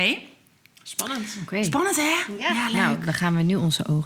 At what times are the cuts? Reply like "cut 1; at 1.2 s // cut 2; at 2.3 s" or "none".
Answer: none